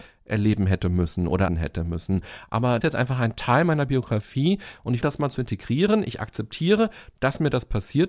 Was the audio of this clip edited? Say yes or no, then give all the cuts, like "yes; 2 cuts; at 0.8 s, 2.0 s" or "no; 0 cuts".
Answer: yes; 3 cuts; at 1.5 s, 2.8 s, 5.0 s